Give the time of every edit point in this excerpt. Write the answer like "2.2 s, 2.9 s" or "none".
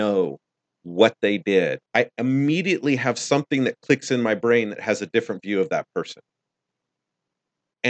1.9 s